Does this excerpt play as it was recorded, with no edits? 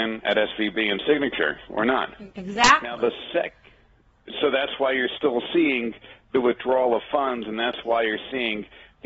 no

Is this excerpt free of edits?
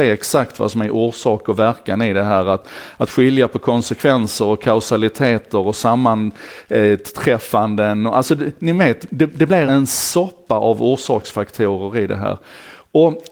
no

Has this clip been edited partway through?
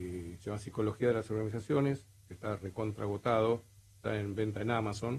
no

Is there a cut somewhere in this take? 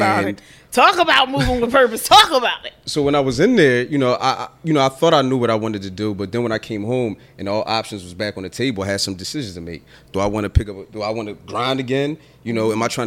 no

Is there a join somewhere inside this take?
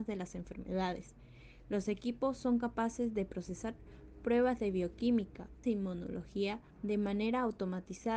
yes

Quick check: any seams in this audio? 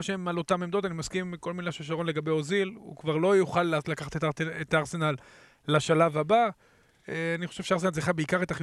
no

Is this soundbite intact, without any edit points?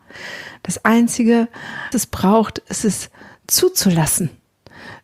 no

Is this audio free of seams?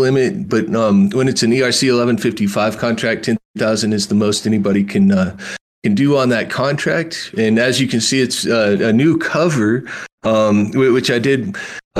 yes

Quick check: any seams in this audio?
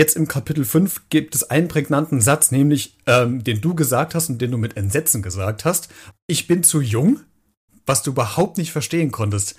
no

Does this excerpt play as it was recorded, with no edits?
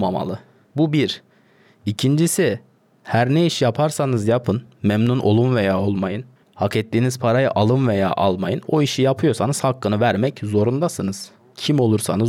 yes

